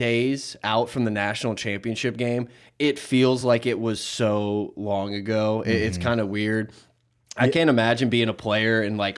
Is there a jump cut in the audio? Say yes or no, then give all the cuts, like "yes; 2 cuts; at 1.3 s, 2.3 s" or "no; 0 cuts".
no; 0 cuts